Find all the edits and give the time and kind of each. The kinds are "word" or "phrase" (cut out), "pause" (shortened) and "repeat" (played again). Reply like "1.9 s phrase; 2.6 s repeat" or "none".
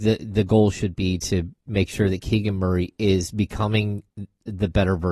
none

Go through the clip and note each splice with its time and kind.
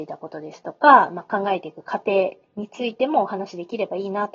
none

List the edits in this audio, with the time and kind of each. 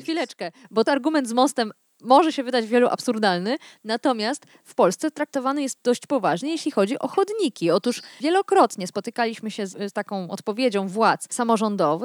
none

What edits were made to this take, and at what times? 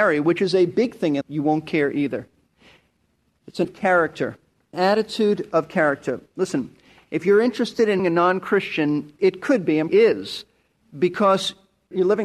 1.2 s word; 3.6 s word; 4.7 s word; 8.0 s word; 9.2 s word; 9.9 s word

